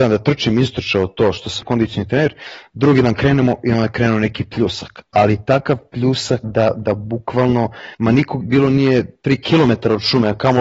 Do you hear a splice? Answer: yes; 4 cuts; at 1.6 s, 6.4 s, 7.9 s, 8.4 s

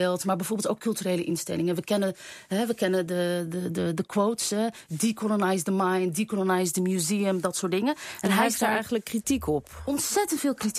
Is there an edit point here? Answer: no; 0 cuts

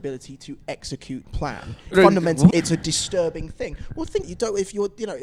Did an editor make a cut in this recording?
yes; 4 cuts; at 1.2 s, 1.9 s, 2.5 s, 4.2 s

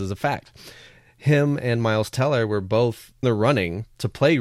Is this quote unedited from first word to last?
no; 1 cut; at 3.2 s

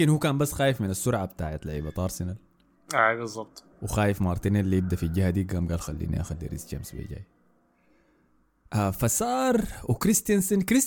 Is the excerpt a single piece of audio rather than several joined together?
no; 1 cut; at 3.7 s

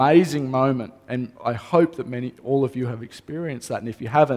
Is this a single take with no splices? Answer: no; 1 cut; at 1.3 s

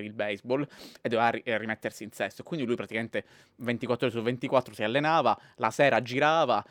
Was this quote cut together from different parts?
no; 0 cuts

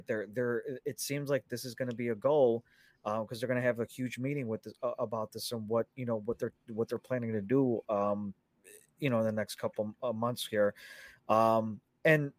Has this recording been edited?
no; 0 cuts

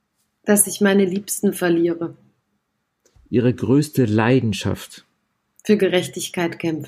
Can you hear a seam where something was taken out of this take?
no; 0 cuts

